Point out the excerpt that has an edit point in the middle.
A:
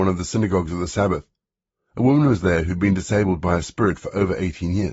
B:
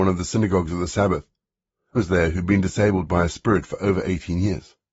B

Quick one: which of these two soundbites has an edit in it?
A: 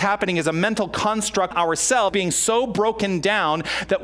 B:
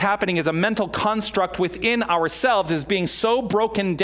A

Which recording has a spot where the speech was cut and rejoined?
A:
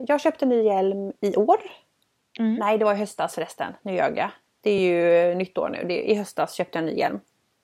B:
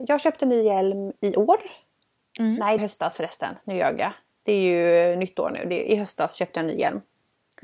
B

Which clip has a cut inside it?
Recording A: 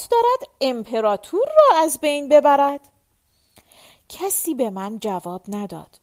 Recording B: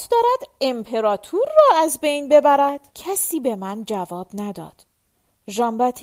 B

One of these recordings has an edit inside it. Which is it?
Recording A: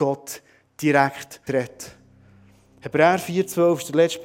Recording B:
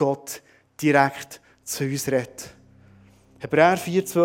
A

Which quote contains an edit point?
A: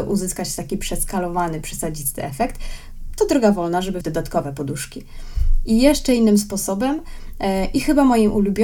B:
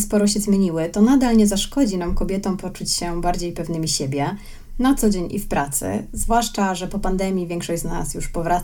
A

